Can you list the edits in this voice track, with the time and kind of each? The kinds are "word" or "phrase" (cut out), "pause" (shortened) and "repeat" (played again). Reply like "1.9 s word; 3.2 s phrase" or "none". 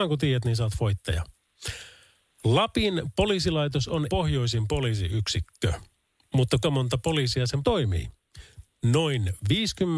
4.1 s word; 6.6 s word; 7.6 s word